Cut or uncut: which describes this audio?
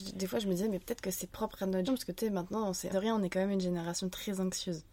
cut